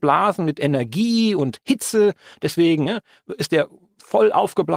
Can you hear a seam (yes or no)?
no